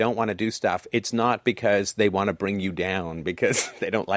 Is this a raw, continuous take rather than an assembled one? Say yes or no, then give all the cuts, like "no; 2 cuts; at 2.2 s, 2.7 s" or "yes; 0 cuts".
yes; 0 cuts